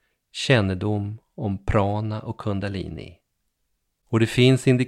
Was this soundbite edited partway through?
no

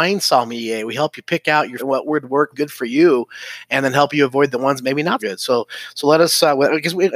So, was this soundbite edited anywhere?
yes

